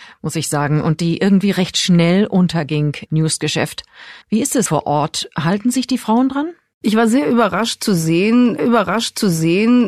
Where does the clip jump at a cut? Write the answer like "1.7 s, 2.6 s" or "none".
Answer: 3.1 s, 4.2 s, 4.7 s, 8.6 s